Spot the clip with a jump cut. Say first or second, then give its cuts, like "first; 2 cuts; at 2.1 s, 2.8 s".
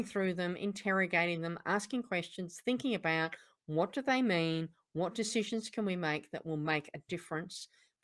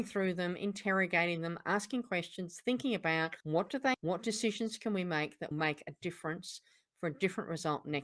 second; 3 cuts; at 3.4 s, 3.9 s, 5.5 s